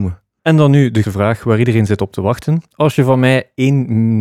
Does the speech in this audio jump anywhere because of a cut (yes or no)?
yes